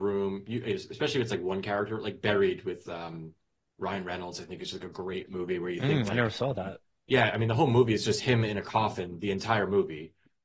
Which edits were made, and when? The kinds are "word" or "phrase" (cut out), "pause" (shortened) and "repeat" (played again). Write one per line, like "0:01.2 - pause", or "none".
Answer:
none